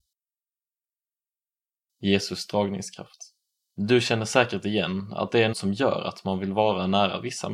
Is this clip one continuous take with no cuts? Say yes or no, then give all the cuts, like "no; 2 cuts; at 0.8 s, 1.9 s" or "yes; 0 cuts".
no; 2 cuts; at 3.5 s, 5.5 s